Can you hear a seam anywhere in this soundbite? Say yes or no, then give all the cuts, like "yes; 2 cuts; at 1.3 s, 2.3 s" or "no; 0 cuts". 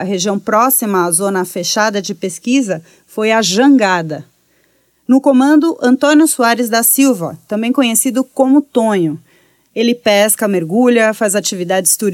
no; 0 cuts